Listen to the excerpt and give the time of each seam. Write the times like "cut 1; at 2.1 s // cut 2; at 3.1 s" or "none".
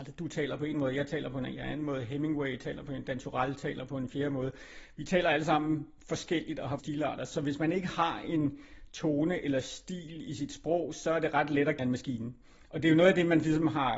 cut 1; at 6.8 s // cut 2; at 11.8 s

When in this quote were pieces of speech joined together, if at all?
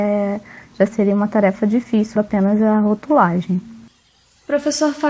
cut 1; at 2.2 s

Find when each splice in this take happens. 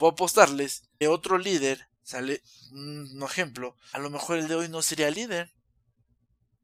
cut 1; at 1.0 s // cut 2; at 1.9 s // cut 3; at 3.9 s // cut 4; at 4.5 s

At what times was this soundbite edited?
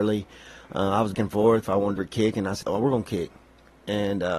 cut 1; at 1.1 s // cut 2; at 1.6 s // cut 3; at 2.0 s // cut 4; at 2.6 s

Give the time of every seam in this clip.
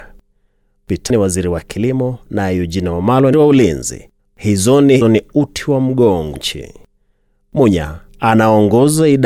cut 1; at 1.1 s // cut 2; at 3.3 s // cut 3; at 4.2 s // cut 4; at 5.0 s // cut 5; at 6.3 s // cut 6; at 8.1 s

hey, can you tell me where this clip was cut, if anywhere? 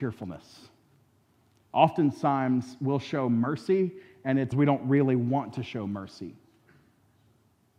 cut 1; at 4.5 s

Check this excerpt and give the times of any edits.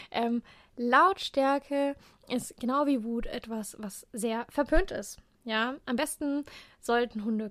none

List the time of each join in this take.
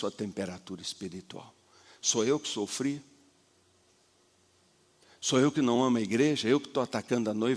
none

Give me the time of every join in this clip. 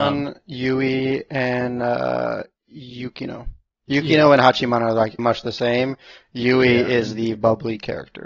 cut 1; at 3.7 s // cut 2; at 5.2 s // cut 3; at 7.3 s

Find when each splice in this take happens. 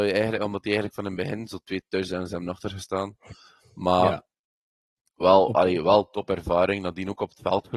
none

